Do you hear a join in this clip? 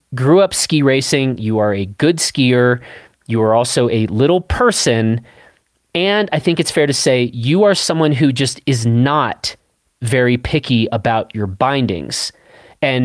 no; 0 cuts

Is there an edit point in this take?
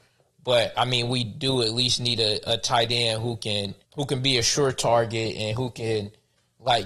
yes; 1 cut; at 3.8 s

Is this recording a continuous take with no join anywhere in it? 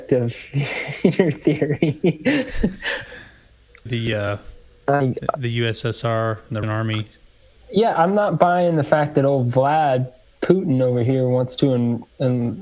no; 2 cuts; at 3.9 s, 6.6 s

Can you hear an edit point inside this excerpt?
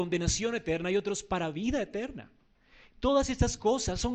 no; 0 cuts

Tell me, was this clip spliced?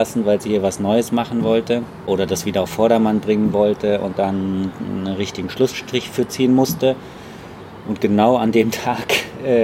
no; 0 cuts

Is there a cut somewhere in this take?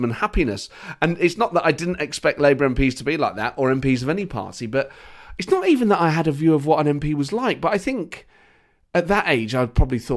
no; 0 cuts

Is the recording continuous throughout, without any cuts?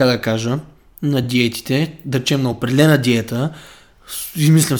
yes; 0 cuts

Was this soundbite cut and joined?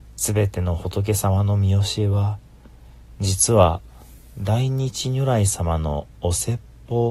no; 0 cuts

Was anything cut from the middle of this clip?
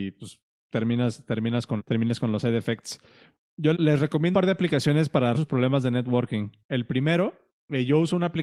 yes; 4 cuts; at 1.8 s, 3.7 s, 4.3 s, 5.3 s

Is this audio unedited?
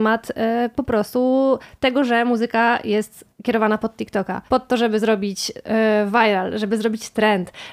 no; 1 cut; at 4.5 s

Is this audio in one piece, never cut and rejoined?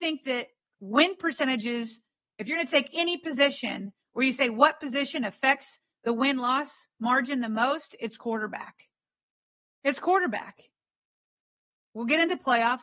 yes; 0 cuts

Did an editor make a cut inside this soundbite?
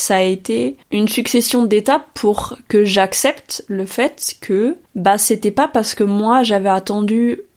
no; 0 cuts

